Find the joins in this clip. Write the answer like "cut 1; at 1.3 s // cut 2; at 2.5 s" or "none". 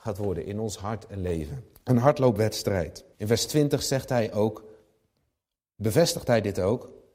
cut 1; at 1.7 s // cut 2; at 3.1 s